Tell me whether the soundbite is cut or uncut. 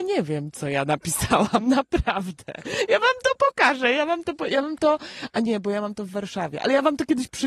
uncut